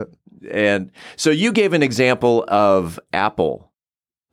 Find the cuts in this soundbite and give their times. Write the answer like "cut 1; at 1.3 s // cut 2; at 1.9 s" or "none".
none